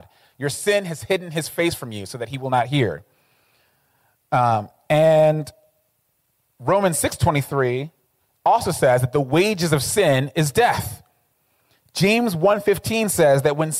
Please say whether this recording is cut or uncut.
uncut